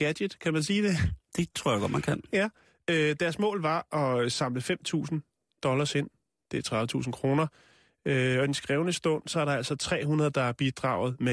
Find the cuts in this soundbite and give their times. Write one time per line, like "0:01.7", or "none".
none